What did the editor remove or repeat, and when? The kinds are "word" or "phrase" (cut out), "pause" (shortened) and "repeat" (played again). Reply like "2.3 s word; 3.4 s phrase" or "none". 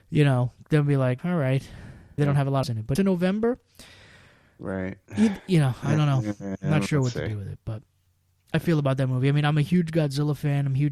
1.2 s word; 2.2 s word; 2.6 s phrase; 3.0 s phrase; 5.1 s pause; 8.5 s phrase